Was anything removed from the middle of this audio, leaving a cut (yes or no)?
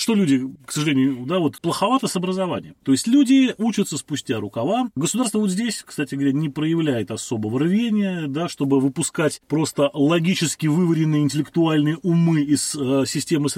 no